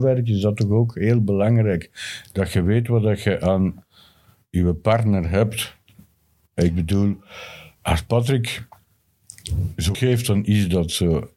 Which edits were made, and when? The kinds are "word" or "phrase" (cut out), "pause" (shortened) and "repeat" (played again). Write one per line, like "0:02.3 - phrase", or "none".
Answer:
0:09.9 - word